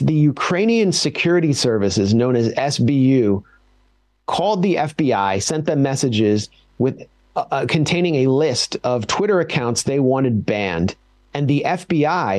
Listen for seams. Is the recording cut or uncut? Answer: uncut